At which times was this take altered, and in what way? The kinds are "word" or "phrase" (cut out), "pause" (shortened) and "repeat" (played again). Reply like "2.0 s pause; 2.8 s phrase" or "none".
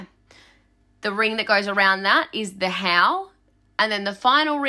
none